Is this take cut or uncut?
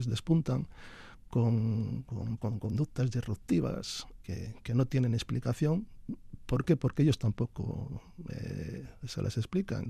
cut